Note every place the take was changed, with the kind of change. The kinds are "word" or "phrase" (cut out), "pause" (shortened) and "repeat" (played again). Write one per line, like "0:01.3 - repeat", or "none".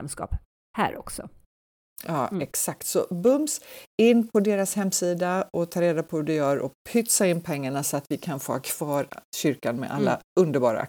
none